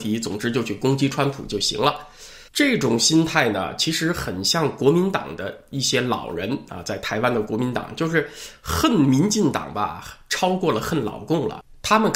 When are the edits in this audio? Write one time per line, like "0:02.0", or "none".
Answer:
0:02.5